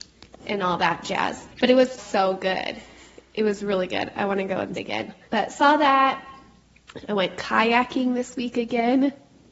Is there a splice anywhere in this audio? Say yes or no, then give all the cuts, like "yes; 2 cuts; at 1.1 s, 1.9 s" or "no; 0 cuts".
yes; 4 cuts; at 1.5 s, 2.0 s, 4.7 s, 5.3 s